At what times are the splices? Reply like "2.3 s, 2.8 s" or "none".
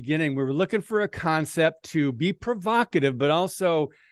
none